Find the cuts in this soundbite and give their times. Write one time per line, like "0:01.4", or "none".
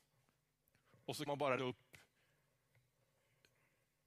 0:01.3
0:01.6